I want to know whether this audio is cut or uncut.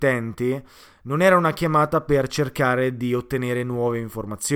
uncut